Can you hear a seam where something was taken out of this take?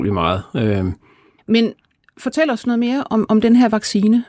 no; 0 cuts

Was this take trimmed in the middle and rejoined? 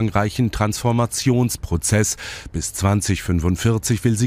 no; 0 cuts

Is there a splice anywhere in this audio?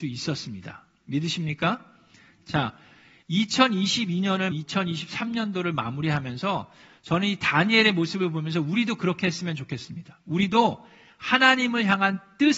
yes; 1 cut; at 4.5 s

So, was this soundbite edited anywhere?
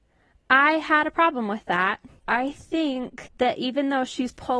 yes; 1 cut; at 2.2 s

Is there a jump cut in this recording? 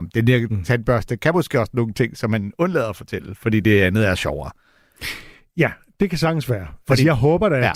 no; 0 cuts

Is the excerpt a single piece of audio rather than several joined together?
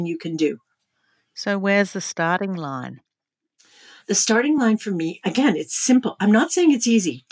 yes; 0 cuts

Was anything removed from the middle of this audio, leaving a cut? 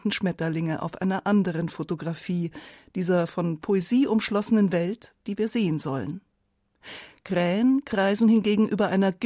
no; 0 cuts

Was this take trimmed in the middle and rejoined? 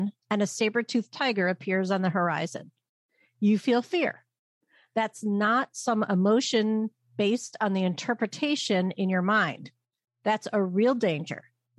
no; 0 cuts

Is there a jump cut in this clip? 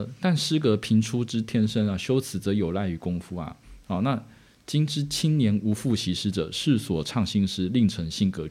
no; 0 cuts

